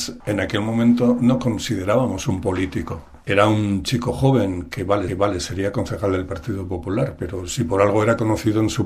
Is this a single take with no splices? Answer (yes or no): no